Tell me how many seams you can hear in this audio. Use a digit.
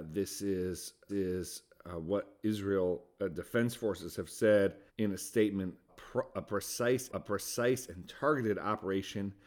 4